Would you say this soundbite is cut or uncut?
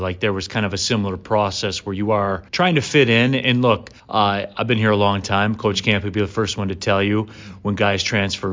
cut